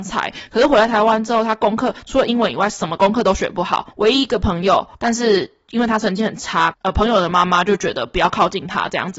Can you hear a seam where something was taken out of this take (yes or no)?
yes